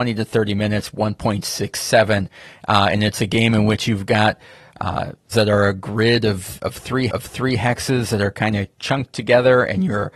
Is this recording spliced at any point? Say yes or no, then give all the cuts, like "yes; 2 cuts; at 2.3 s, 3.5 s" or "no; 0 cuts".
yes; 2 cuts; at 5.3 s, 7.1 s